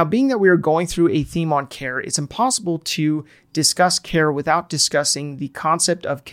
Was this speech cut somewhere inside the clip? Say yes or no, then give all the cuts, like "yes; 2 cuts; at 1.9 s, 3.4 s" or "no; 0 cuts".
no; 0 cuts